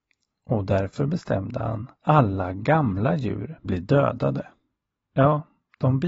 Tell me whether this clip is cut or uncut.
cut